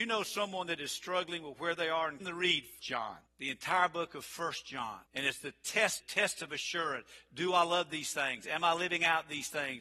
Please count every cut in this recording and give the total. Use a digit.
5